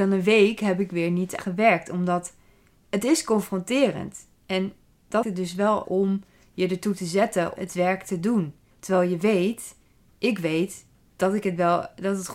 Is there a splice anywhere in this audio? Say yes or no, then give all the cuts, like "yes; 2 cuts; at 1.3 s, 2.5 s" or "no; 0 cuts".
yes; 4 cuts; at 1.4 s, 5.2 s, 5.8 s, 7.6 s